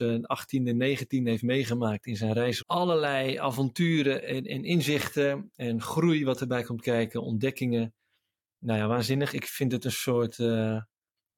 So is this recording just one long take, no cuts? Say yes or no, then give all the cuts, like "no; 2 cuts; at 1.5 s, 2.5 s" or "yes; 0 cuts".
no; 1 cut; at 2.6 s